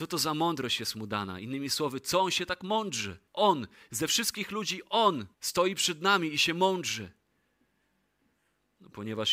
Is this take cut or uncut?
cut